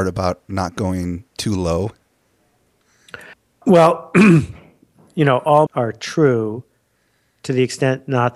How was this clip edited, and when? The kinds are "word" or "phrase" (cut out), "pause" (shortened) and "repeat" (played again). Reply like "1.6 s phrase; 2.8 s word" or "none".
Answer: 1.3 s pause; 3.3 s pause; 5.7 s word